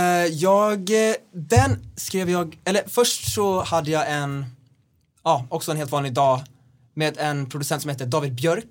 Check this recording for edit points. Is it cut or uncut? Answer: uncut